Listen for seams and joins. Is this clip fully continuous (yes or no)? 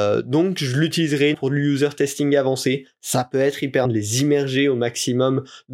no